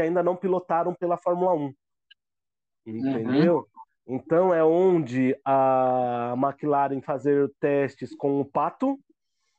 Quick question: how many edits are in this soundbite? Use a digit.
1